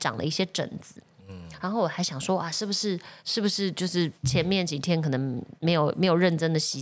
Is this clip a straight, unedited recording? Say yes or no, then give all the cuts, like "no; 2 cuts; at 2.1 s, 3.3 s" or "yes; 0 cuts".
no; 3 cuts; at 3.2 s, 4.2 s, 5.6 s